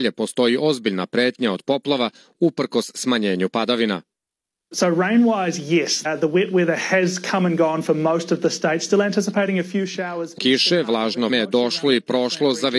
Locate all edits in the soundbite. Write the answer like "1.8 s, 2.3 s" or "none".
6.0 s, 10.4 s, 11.3 s